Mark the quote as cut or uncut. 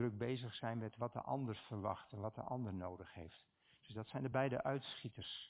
uncut